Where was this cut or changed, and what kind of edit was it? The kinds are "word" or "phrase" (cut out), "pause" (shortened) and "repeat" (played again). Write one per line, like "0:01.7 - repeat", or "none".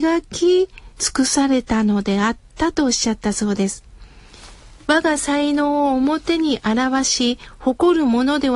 0:00.9 - pause